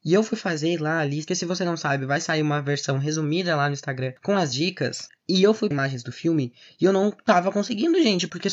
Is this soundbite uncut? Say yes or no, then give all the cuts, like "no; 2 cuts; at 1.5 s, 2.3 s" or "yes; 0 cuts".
no; 2 cuts; at 1.3 s, 5.7 s